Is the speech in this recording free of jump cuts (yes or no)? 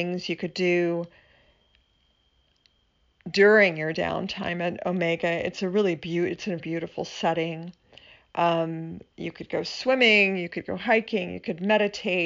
no